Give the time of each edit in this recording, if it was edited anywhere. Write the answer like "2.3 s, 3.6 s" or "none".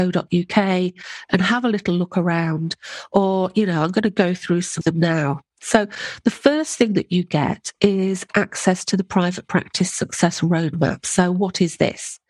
4.8 s